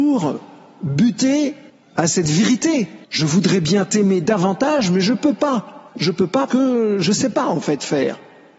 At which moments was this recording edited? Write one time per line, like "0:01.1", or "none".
0:01.7
0:03.0
0:05.9
0:06.5